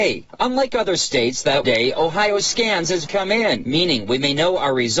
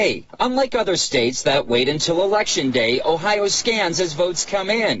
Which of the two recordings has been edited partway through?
first; 2 cuts; at 1.6 s, 3.1 s

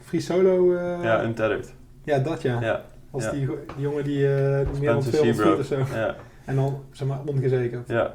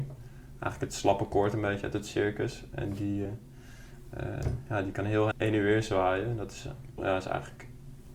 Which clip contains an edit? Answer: second; 3 cuts; at 3.2 s, 5.3 s, 7.0 s

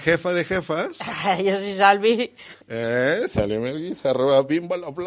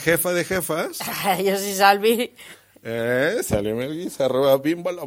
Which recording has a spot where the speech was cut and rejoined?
first; 1 cut; at 2.6 s

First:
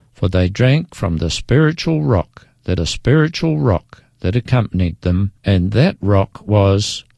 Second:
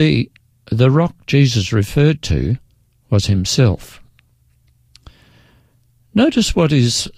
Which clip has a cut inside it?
first; 2 cuts; at 2.8 s, 5.4 s

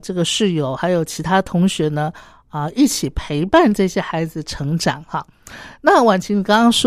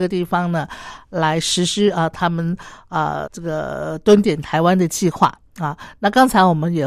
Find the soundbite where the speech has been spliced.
second; 1 cut; at 3.3 s

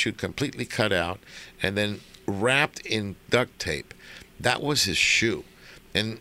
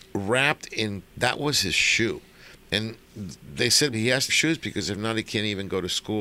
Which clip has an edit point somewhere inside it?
second; 4 cuts; at 1.1 s, 3.0 s, 3.9 s, 4.3 s

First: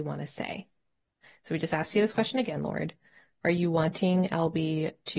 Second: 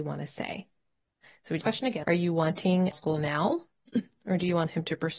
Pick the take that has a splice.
second; 3 cuts; at 1.6 s, 2.0 s, 2.9 s

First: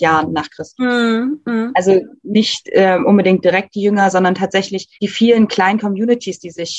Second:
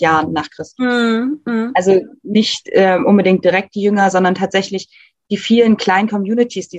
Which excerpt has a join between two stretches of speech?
first; 1 cut; at 4.9 s

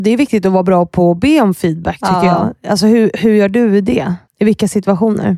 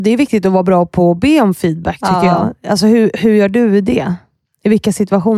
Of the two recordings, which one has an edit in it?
first; 1 cut; at 4.3 s

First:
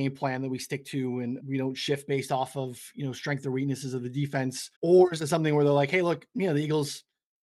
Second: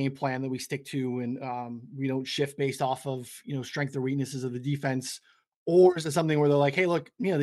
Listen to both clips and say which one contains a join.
first; 2 cuts; at 1.4 s, 4.7 s

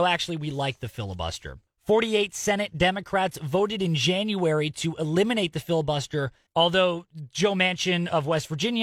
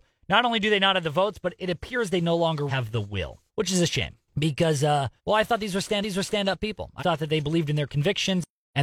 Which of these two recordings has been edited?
second; 5 cuts; at 2.7 s, 3.5 s, 5.2 s, 6.0 s, 7.0 s

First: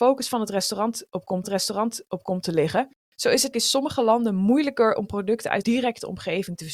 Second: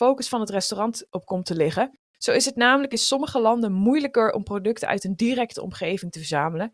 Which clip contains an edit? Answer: first; 3 cuts; at 1.4 s, 3.5 s, 5.6 s

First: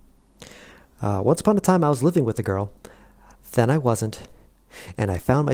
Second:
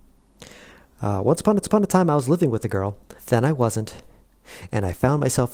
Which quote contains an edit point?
second; 2 cuts; at 1.6 s, 3.2 s

